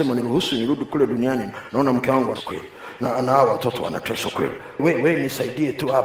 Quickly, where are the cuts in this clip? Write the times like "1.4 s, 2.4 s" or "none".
2.4 s, 4.8 s